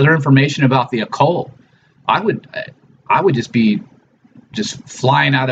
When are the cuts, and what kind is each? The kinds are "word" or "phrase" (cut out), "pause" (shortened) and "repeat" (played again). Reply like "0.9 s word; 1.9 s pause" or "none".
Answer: none